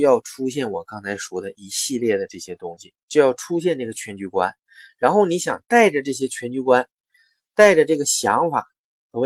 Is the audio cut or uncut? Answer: uncut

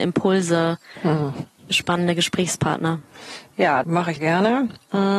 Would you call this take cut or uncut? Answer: cut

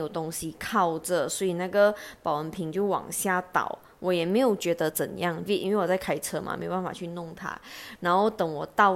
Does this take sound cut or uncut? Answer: cut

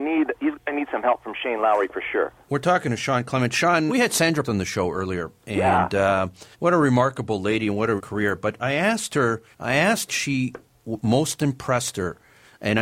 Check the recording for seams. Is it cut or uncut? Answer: cut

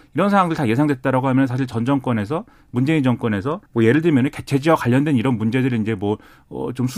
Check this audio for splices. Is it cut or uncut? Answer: cut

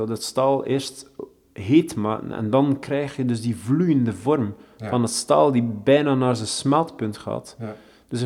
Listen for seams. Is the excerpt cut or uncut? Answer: uncut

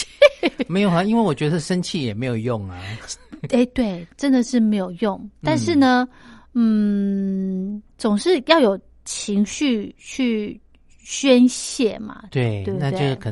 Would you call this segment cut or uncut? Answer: uncut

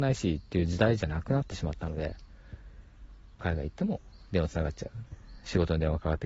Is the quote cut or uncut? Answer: cut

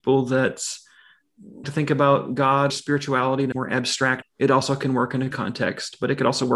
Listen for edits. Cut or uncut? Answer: cut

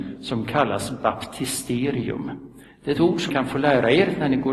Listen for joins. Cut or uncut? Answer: cut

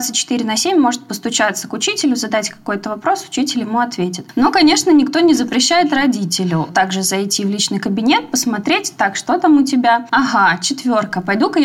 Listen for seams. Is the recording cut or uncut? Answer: uncut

